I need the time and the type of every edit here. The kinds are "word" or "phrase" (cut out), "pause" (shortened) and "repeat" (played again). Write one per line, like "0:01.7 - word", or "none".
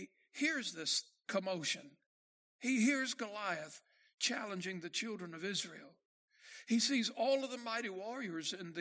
none